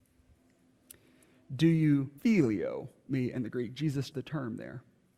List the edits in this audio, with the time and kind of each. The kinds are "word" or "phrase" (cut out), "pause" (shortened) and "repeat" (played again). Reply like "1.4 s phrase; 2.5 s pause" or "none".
2.2 s pause; 4.1 s word